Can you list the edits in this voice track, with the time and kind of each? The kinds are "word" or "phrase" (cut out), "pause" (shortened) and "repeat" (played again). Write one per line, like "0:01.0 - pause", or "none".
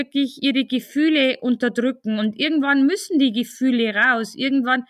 none